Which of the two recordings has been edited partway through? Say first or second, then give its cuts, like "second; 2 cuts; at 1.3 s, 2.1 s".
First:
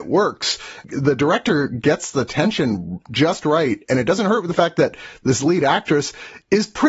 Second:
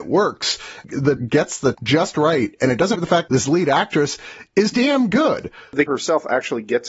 second; 6 cuts; at 1.2 s, 1.7 s, 2.9 s, 3.3 s, 4.7 s, 5.9 s